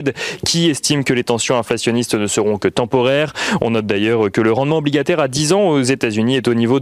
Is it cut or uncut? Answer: uncut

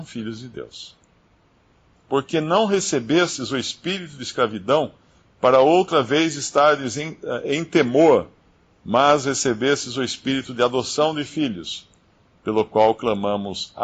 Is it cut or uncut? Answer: uncut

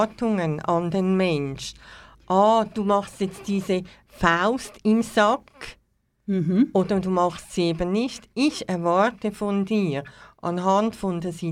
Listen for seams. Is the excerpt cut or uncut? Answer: uncut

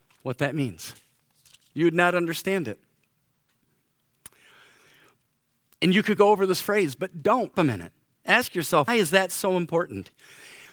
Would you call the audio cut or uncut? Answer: cut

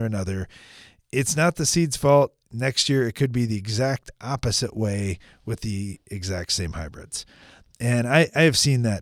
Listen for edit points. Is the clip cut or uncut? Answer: uncut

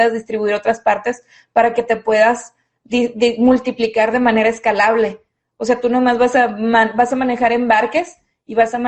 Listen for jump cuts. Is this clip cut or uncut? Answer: uncut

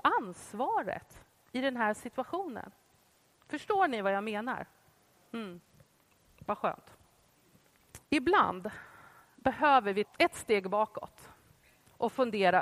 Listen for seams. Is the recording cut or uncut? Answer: cut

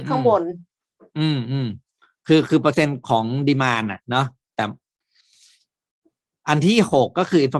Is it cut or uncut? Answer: cut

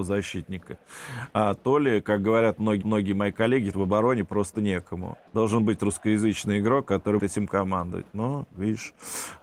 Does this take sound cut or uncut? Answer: cut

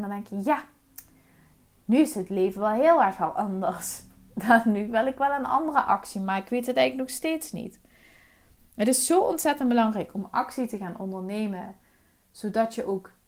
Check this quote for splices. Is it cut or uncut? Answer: uncut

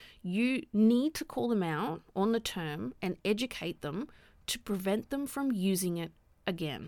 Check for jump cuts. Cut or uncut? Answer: uncut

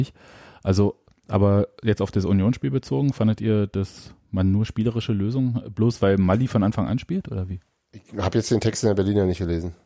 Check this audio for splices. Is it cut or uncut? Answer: uncut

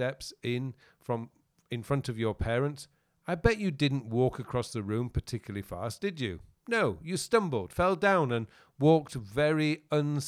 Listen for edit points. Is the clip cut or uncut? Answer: uncut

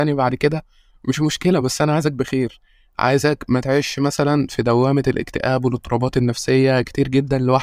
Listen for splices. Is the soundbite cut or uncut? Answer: uncut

